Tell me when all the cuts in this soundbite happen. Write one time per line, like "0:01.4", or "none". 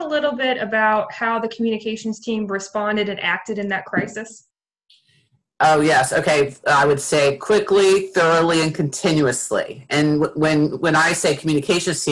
none